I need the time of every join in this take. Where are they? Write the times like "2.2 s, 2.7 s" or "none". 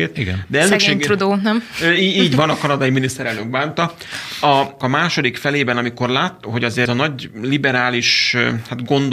4.8 s, 6.4 s, 6.9 s